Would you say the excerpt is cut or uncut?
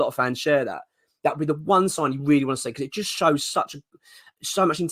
uncut